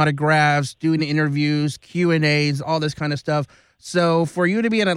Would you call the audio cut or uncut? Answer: uncut